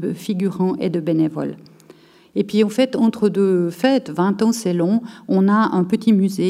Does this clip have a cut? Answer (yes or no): no